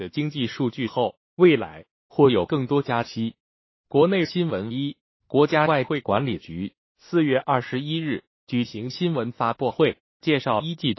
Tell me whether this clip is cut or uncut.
uncut